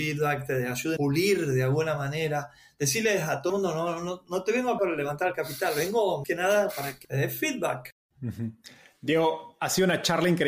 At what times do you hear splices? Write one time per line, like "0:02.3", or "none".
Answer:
0:01.0
0:03.5
0:04.8
0:06.2
0:07.0